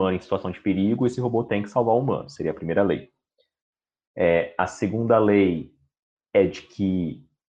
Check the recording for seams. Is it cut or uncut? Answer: uncut